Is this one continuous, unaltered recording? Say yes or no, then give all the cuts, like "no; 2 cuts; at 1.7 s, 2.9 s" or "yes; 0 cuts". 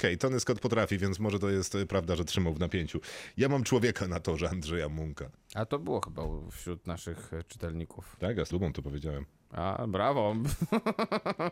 no; 2 cuts; at 5.3 s, 8.5 s